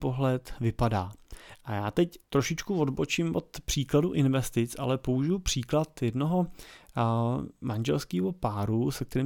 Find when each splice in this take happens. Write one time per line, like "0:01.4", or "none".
0:02.2